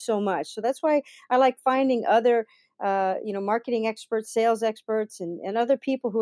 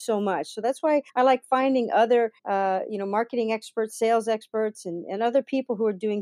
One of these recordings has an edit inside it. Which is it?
second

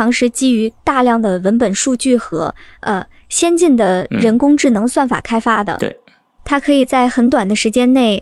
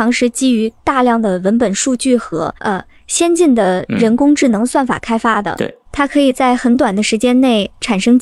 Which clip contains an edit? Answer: second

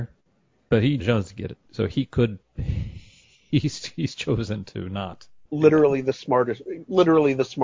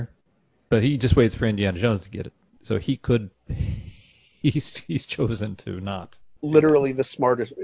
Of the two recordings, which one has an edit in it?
first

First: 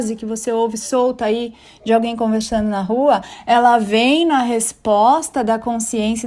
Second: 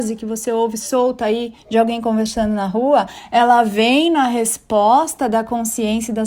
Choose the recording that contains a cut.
second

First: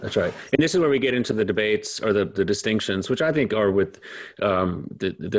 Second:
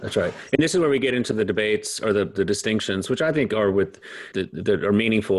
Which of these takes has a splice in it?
second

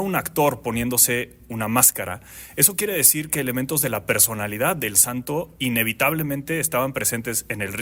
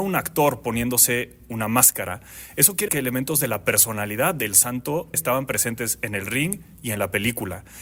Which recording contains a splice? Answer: second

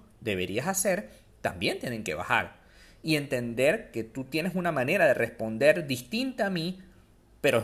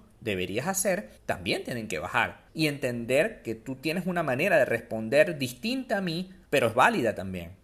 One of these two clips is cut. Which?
second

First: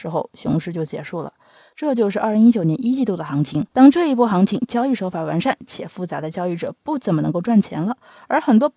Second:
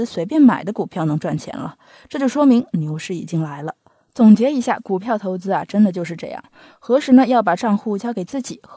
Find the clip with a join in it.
first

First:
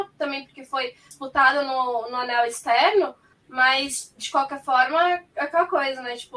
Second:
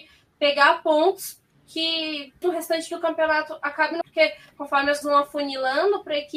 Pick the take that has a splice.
second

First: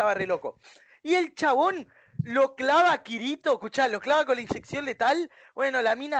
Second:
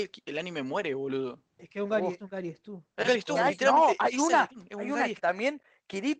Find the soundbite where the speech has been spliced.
second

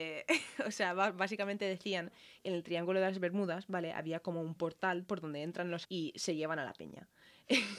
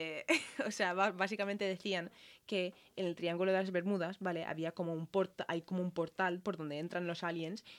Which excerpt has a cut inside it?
first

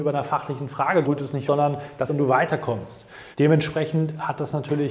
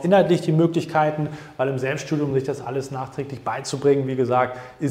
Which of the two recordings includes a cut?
first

